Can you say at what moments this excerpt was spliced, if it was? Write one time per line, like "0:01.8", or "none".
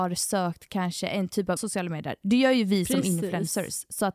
0:01.6